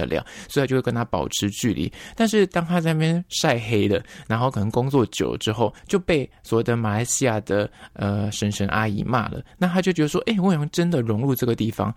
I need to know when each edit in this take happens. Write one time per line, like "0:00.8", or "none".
0:05.8